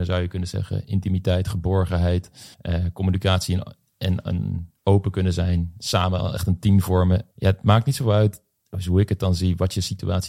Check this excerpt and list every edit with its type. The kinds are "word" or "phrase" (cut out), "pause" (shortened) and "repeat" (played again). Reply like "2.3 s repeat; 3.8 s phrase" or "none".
2.5 s pause; 4.8 s pause; 7.3 s pause